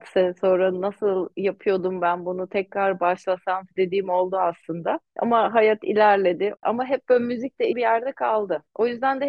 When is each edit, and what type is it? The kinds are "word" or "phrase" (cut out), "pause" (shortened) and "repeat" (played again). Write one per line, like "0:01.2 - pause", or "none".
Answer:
0:03.7 - word
0:07.7 - word